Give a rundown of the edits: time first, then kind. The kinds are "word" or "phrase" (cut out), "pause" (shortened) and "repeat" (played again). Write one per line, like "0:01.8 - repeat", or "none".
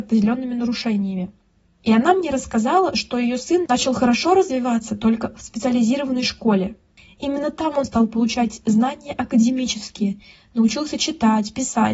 none